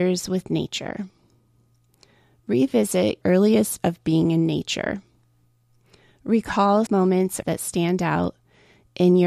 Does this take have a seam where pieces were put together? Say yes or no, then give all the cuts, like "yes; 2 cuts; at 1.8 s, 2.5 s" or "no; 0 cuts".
yes; 4 cuts; at 3.2 s, 3.8 s, 6.9 s, 7.4 s